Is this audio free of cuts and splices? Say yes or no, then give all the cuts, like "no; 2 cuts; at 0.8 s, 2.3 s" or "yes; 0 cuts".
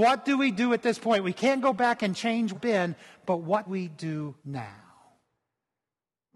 no; 3 cuts; at 2.5 s, 3.7 s, 4.4 s